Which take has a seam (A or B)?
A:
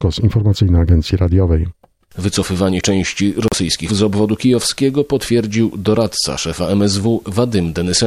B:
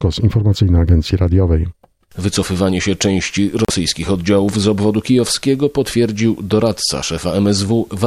A